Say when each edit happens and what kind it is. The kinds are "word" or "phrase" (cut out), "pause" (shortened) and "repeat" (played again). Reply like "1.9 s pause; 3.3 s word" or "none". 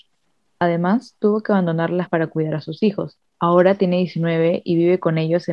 2.1 s word; 3.3 s pause